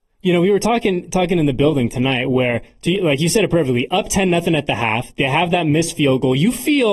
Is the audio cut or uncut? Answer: uncut